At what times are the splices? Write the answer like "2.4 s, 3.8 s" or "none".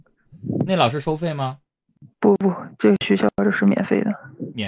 2.1 s